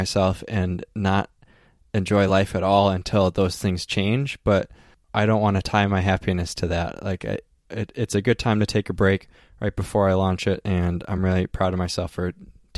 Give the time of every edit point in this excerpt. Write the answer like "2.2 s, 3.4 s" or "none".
none